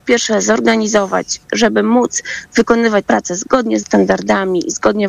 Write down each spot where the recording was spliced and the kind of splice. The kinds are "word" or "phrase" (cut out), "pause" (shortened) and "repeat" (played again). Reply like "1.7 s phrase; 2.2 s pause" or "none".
3.0 s word; 3.8 s word

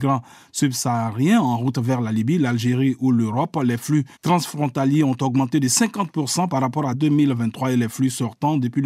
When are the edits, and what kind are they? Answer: 4.1 s pause; 6.9 s word

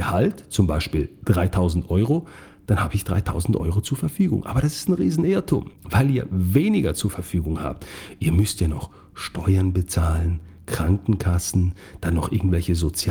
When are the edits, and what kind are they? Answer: 5.7 s pause

